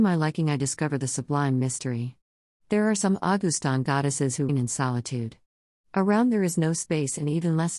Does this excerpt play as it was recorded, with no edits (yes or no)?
no